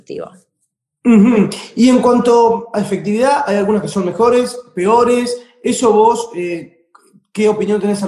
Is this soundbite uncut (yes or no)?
yes